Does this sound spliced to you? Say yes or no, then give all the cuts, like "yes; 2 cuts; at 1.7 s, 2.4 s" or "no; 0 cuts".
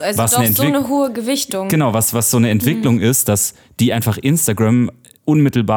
no; 0 cuts